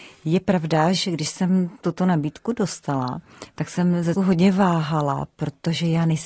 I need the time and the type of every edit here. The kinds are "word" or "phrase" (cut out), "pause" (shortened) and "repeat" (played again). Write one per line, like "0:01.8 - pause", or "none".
0:04.2 - word